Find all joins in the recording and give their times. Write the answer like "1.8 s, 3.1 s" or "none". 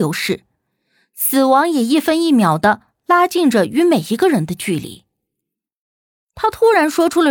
none